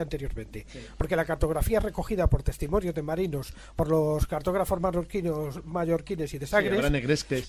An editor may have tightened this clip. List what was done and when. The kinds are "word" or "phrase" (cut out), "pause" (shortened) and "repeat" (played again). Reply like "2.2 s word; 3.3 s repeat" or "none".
none